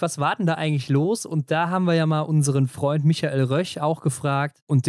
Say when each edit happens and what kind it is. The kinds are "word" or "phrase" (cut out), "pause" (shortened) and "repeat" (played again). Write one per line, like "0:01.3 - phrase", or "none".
none